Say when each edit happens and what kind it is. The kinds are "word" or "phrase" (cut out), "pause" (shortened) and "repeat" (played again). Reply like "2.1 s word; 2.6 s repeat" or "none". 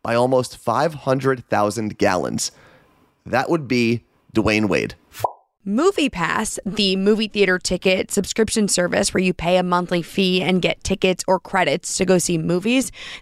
none

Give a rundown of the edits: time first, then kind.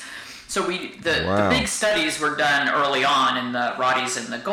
none

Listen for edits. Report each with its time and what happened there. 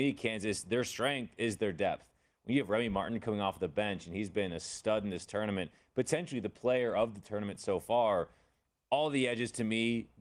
none

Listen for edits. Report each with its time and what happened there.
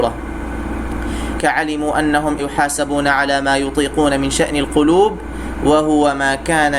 1.4 s word; 2.4 s word

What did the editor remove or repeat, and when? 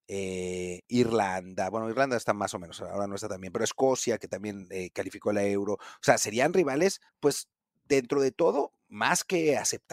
7.1 s pause; 8.8 s pause

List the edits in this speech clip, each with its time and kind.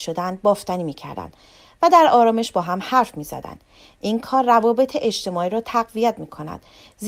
none

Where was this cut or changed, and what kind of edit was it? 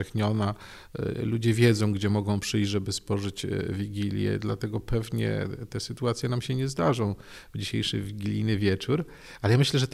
none

